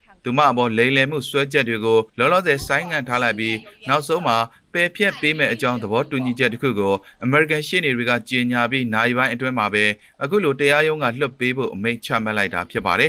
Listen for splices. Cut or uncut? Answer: cut